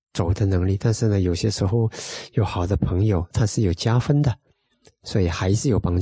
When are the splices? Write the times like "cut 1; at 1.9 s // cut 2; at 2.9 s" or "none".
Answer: cut 1; at 3.3 s